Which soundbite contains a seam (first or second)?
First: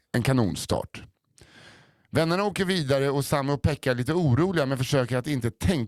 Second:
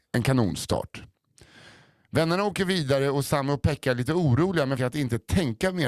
second